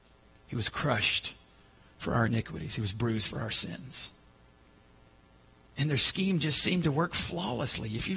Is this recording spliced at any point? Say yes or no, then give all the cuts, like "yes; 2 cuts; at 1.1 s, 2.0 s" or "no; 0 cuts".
no; 0 cuts